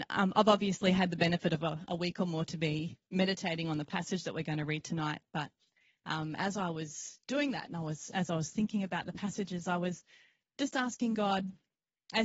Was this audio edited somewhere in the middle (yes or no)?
no